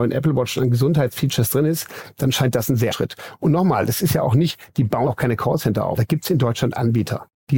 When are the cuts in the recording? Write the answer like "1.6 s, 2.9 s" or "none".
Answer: 2.9 s, 5.1 s, 6.0 s